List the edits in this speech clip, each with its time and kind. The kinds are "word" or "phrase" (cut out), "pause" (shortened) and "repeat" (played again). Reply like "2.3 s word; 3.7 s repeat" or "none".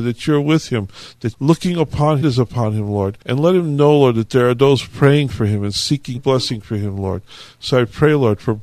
1.3 s word; 2.2 s phrase; 3.2 s pause; 6.2 s word